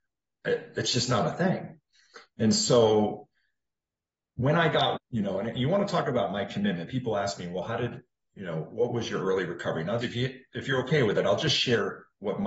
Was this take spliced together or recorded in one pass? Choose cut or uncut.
cut